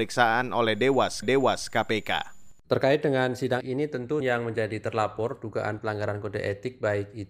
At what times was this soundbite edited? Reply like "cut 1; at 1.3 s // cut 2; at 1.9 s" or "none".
cut 1; at 1.2 s // cut 2; at 3.6 s // cut 3; at 4.2 s